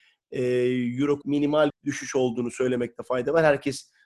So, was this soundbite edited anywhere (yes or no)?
yes